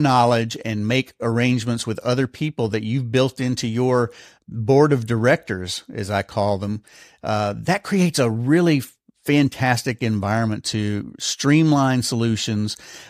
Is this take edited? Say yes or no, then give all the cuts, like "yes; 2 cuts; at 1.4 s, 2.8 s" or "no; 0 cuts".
no; 0 cuts